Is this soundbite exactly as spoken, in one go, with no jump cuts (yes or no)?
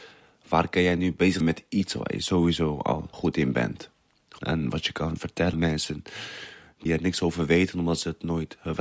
no